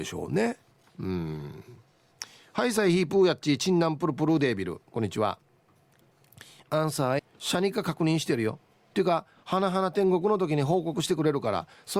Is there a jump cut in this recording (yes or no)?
yes